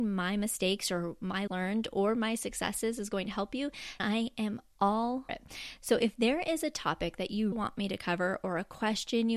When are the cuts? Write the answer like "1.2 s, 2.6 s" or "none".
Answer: 1.5 s, 4.0 s, 5.3 s, 7.5 s